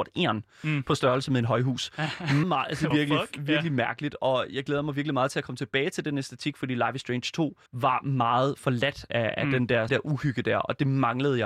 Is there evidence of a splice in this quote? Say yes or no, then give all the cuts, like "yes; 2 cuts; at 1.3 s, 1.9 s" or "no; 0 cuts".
yes; 4 cuts; at 2.4 s, 2.9 s, 7.7 s, 9.9 s